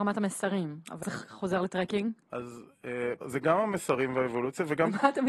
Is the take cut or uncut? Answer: cut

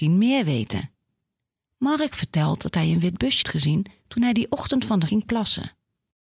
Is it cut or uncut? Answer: cut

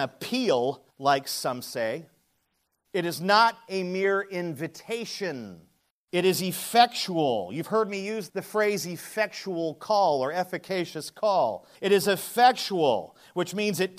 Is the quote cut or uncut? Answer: cut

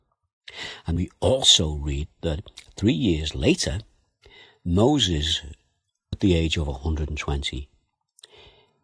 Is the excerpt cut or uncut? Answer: cut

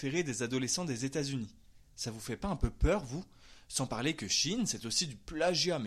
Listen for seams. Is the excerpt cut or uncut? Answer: uncut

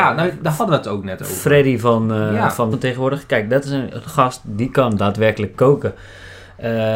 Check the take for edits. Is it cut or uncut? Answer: cut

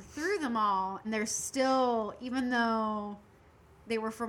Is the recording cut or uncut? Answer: cut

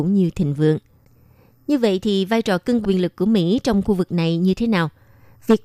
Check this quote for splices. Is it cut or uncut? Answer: cut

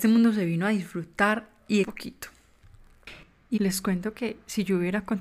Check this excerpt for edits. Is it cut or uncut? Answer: cut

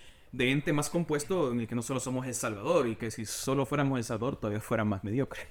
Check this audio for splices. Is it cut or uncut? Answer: uncut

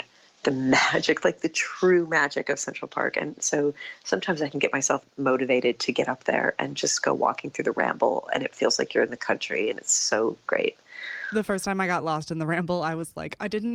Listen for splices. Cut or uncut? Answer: uncut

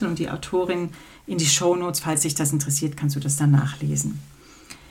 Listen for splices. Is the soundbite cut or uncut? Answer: uncut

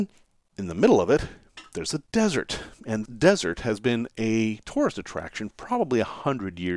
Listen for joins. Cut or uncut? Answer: cut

